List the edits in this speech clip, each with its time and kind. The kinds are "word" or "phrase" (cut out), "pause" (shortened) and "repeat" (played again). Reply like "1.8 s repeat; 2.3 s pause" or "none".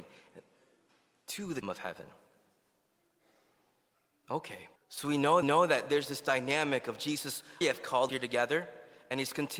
1.6 s word; 4.8 s pause; 5.4 s repeat; 7.6 s word; 8.1 s word